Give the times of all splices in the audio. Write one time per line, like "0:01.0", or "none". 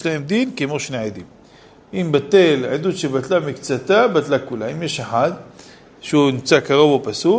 none

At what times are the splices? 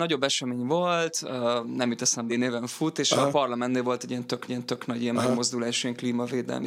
0:02.3
0:04.5

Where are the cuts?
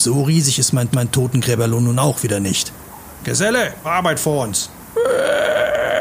0:00.9
0:03.8

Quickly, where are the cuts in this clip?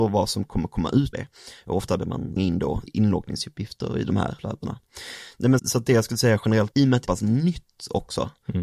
0:01.1
0:02.0
0:02.4
0:02.9
0:04.4
0:05.6
0:06.7
0:07.1

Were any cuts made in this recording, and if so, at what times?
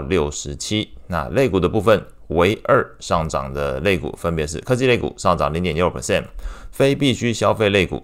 none

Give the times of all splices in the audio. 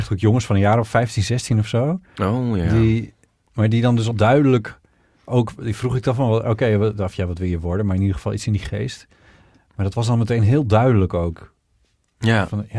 0:04.1

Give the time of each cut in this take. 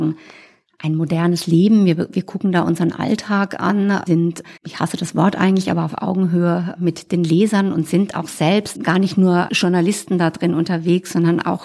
0:04.6
0:08.7

